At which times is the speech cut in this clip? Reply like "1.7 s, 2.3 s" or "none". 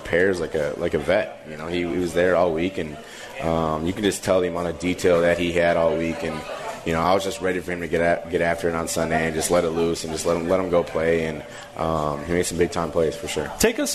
none